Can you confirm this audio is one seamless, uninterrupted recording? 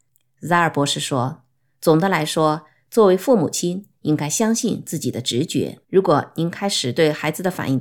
no; 1 cut; at 5.8 s

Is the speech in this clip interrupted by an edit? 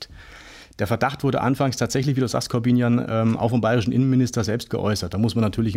no; 0 cuts

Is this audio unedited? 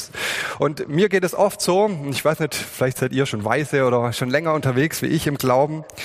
yes; 0 cuts

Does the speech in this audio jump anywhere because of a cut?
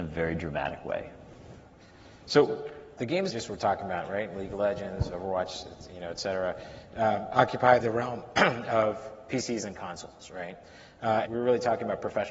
yes; 4 cuts; at 3.0 s, 3.3 s, 7.8 s, 11.3 s

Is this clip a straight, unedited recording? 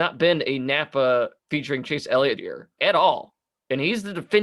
no; 3 cuts; at 1.4 s, 2.4 s, 2.8 s

